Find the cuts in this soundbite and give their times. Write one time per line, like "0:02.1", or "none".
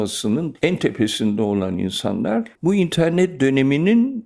0:02.6